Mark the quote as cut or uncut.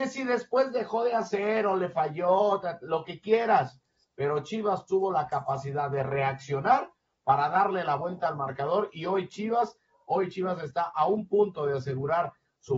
uncut